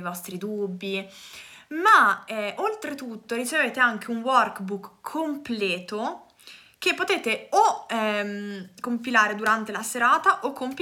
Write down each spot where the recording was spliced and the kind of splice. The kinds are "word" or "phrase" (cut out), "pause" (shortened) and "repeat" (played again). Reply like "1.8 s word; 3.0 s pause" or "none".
none